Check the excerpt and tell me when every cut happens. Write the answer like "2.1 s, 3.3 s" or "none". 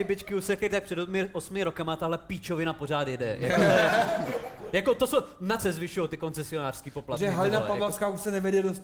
5.6 s